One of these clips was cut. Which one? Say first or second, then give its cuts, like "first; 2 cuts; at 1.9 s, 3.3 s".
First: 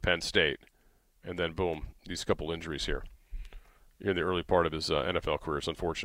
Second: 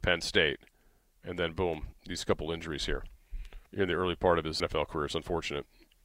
second; 2 cuts; at 3.7 s, 4.6 s